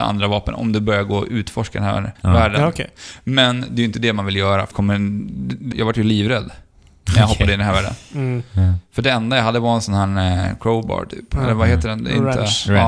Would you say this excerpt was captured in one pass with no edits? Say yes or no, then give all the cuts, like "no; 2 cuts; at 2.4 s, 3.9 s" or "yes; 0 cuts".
no; 3 cuts; at 2.1 s, 4.7 s, 5.7 s